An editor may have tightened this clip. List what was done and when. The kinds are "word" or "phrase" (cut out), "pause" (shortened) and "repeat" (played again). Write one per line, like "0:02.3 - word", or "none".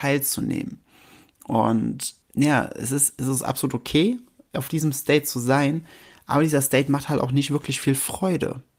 0:02.2 - pause